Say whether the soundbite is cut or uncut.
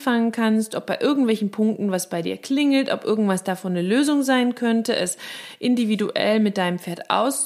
uncut